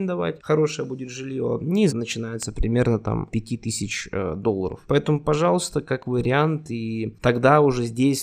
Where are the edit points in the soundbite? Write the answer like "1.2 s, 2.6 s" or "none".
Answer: 1.9 s, 3.3 s